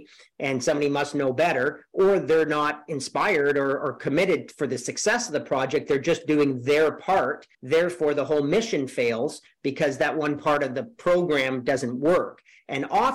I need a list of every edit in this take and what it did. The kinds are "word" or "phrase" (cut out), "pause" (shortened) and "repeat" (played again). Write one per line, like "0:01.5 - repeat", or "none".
0:07.5 - pause